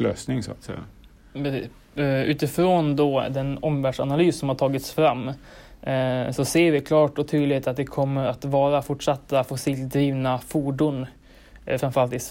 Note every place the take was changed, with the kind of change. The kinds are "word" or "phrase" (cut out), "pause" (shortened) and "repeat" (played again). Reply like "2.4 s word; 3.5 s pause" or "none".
none